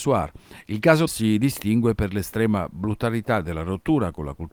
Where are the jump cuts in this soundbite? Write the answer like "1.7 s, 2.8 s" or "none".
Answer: 1.1 s